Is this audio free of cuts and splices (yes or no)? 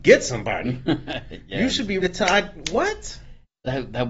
no